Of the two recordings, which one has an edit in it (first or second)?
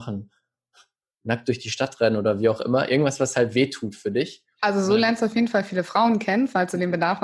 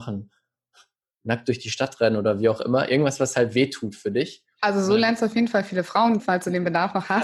second